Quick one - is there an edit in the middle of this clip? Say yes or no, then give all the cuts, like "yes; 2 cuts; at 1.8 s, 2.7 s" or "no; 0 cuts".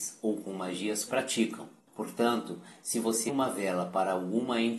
yes; 2 cuts; at 1.1 s, 3.3 s